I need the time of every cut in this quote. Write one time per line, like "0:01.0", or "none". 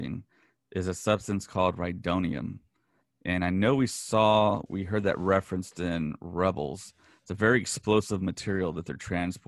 0:04.7